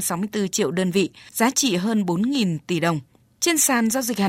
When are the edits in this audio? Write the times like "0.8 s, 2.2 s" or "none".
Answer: none